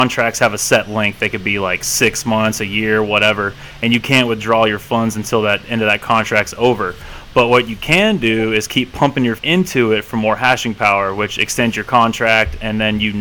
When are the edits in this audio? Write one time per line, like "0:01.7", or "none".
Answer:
0:09.4